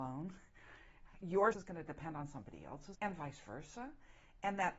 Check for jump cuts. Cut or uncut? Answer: cut